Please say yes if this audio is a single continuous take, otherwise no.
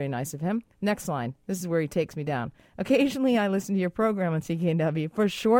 yes